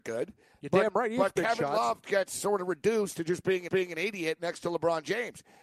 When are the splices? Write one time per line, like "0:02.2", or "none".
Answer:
0:03.7